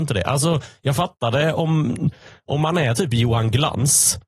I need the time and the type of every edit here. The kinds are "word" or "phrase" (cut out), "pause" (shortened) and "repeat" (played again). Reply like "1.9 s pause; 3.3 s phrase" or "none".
none